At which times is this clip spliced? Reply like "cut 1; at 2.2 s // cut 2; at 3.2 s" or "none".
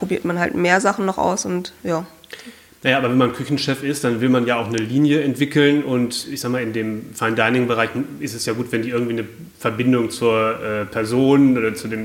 none